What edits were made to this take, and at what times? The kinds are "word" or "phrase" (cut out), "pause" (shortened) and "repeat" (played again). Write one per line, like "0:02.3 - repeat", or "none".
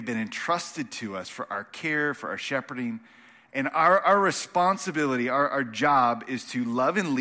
none

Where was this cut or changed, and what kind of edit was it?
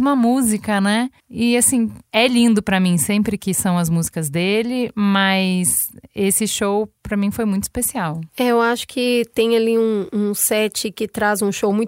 0:01.2 - pause
0:08.3 - pause

